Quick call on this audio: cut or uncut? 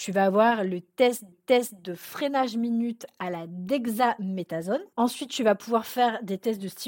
cut